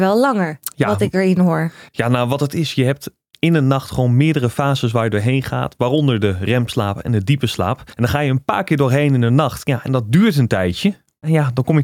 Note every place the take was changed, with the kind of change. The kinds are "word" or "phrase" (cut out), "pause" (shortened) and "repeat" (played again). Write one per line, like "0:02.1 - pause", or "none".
0:07.9 - pause